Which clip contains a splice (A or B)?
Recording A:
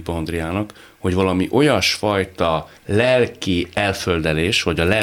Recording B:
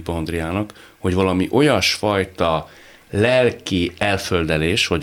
A